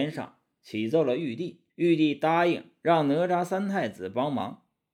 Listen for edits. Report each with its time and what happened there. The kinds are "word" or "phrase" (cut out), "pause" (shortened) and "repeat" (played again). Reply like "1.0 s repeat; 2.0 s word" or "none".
1.7 s pause